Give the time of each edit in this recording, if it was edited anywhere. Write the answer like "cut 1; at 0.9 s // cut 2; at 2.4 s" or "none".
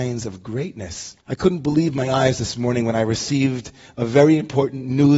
cut 1; at 1.2 s